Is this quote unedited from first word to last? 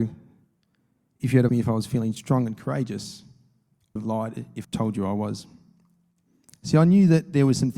no; 3 cuts; at 1.5 s, 4.0 s, 4.6 s

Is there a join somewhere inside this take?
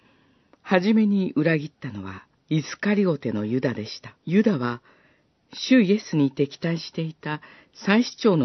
yes; 2 cuts; at 2.3 s, 4.2 s

